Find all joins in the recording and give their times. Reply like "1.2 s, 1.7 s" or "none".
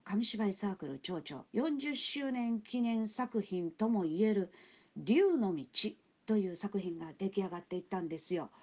1.5 s